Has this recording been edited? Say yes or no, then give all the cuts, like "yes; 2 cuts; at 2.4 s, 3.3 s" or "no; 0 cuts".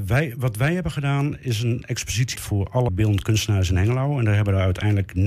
yes; 2 cuts; at 2.4 s, 2.9 s